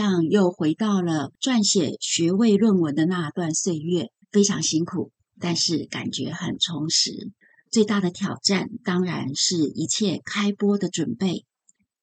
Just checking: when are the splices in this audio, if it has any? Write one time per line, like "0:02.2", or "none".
0:04.2
0:07.4